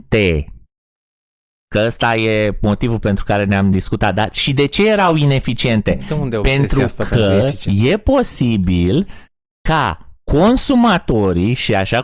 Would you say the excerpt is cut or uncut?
uncut